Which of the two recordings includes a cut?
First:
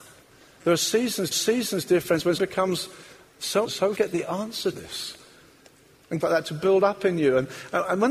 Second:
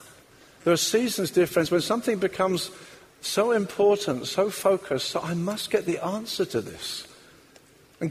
first; 6 cuts; at 1.3 s, 2.4 s, 3.6 s, 3.9 s, 4.7 s, 6.2 s

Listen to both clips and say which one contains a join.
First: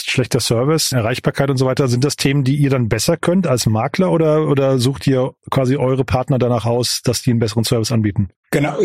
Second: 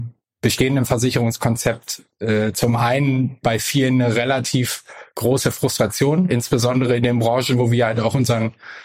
first; 1 cut; at 0.9 s

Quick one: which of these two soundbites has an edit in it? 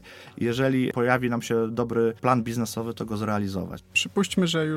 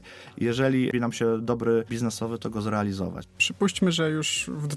second; 2 cuts; at 0.9 s, 1.9 s

